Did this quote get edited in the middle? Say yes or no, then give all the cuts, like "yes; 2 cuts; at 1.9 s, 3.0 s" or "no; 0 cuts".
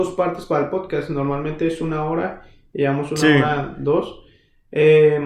no; 0 cuts